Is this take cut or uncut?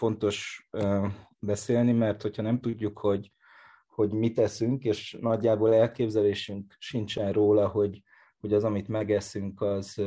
uncut